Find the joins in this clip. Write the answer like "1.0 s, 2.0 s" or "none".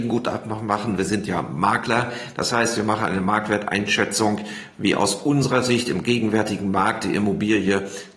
none